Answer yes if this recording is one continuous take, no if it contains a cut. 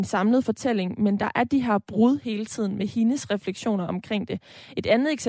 yes